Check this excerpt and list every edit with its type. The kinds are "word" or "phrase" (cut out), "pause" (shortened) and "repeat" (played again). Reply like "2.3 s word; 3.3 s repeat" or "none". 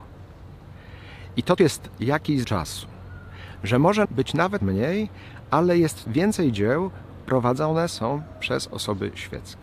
1.6 s word; 2.4 s word; 4.0 s word; 4.6 s word; 6.0 s word; 7.2 s word